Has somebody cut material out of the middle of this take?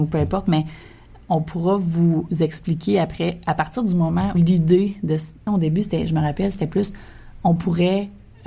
yes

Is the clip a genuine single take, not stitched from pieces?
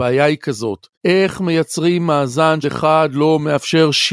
no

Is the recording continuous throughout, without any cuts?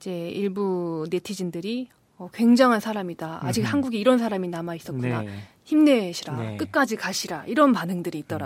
yes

